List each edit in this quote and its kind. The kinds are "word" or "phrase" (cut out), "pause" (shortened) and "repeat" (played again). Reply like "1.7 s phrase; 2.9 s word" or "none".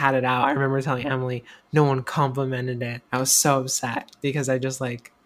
3.1 s pause